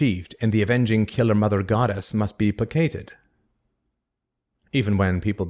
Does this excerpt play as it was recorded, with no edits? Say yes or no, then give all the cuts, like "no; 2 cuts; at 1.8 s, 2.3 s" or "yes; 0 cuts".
yes; 0 cuts